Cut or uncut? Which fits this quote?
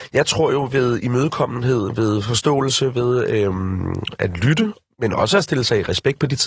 uncut